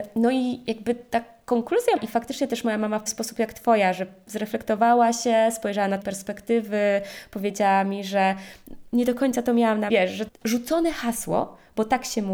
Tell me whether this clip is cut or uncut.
cut